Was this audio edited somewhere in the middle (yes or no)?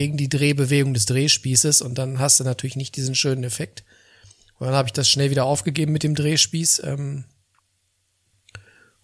no